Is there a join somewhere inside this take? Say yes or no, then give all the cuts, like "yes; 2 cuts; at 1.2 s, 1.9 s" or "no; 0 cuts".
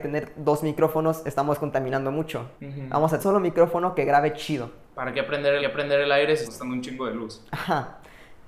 yes; 4 cuts; at 2.5 s, 3.2 s, 5.6 s, 6.5 s